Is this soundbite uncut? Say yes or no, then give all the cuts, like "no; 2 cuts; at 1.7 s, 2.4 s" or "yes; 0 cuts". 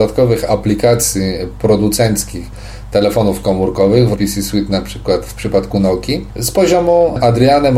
no; 1 cut; at 4.1 s